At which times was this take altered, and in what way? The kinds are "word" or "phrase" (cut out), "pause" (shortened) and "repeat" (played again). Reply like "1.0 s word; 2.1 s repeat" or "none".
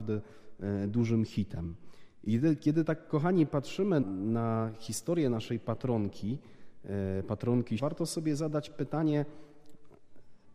4.0 s word; 7.8 s word